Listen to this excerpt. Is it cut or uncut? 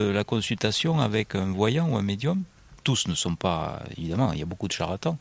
cut